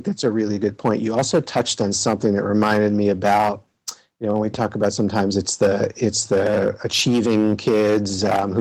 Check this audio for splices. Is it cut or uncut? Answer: uncut